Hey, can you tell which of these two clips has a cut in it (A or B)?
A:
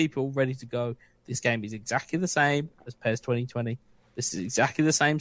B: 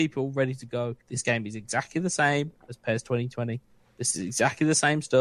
B